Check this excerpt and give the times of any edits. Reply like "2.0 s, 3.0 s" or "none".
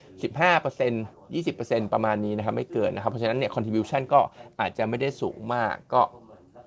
1.1 s